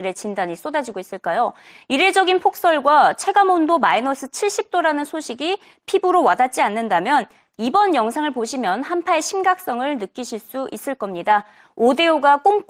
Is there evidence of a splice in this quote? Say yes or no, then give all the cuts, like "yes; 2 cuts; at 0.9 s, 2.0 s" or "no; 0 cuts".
no; 0 cuts